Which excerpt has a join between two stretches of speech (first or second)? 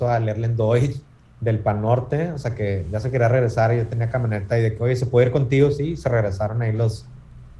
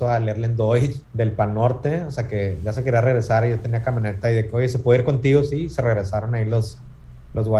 second